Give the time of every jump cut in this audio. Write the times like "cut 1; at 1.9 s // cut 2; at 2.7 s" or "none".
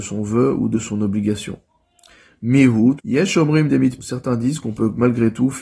cut 1; at 3.0 s // cut 2; at 4.0 s